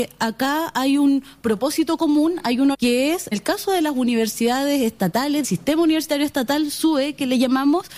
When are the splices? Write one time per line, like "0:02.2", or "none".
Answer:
0:02.7
0:03.3
0:05.4